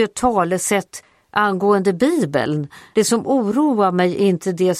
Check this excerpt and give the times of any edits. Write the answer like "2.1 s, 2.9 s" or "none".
2.9 s